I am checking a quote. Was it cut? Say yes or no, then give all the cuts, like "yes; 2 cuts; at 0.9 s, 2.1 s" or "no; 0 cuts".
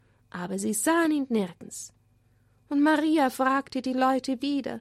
no; 0 cuts